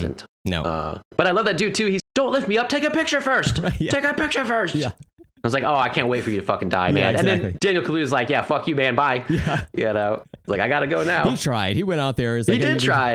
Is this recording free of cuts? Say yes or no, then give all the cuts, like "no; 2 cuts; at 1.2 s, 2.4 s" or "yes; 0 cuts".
no; 3 cuts; at 1.1 s, 2.0 s, 7.6 s